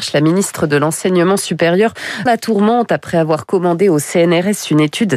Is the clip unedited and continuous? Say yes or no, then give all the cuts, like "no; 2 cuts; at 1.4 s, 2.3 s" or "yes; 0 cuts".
no; 1 cut; at 2.3 s